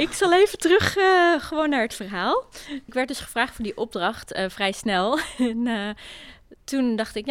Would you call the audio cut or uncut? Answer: uncut